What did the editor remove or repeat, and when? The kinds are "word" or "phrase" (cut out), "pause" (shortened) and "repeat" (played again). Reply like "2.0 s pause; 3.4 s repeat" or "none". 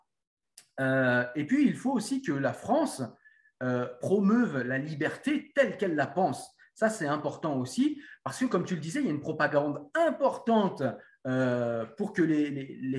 none

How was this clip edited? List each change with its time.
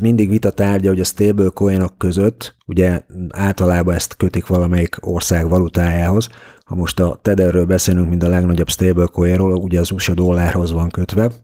none

